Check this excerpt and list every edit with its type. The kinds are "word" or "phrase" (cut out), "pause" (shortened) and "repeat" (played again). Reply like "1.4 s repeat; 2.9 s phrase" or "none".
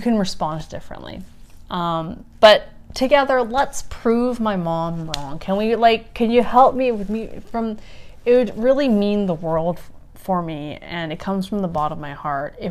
none